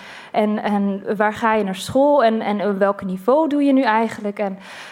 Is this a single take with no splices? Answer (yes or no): yes